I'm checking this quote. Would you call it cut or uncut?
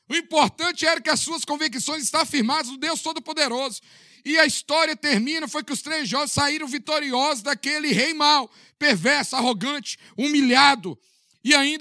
uncut